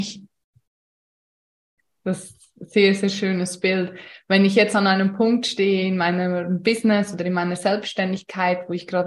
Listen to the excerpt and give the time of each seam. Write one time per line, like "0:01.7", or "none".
none